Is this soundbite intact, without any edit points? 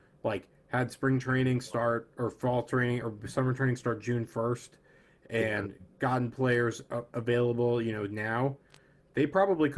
yes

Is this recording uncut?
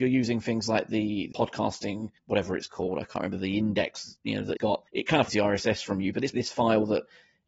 no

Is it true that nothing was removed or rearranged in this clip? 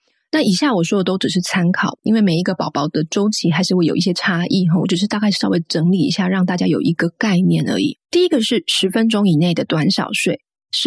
no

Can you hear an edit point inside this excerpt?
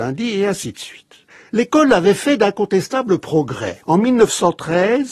yes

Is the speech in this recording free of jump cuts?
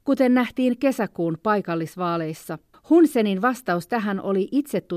no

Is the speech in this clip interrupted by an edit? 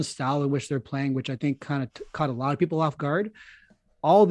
no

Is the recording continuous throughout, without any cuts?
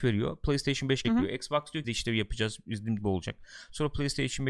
no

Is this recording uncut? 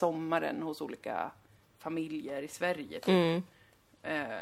yes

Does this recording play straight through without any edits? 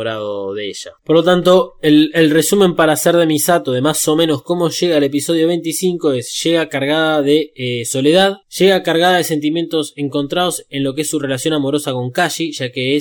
no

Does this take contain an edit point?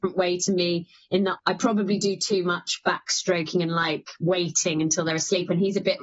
no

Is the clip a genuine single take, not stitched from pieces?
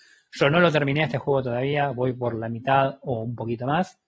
yes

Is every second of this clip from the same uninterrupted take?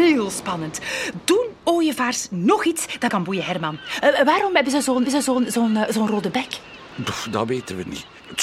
no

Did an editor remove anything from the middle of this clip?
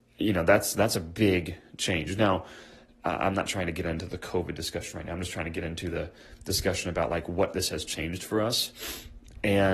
yes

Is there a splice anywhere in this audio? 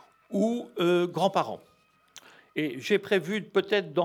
no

